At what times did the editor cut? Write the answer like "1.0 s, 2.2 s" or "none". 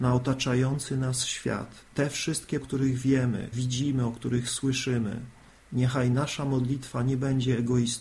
1.9 s, 2.6 s, 3.5 s